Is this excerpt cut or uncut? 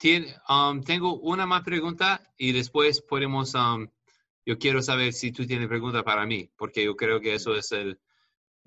uncut